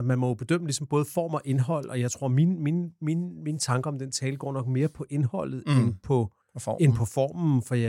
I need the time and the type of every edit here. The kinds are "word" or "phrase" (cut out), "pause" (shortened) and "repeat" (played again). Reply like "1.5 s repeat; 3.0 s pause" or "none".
6.4 s pause